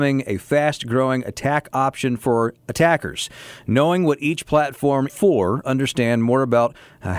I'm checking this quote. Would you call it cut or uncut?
cut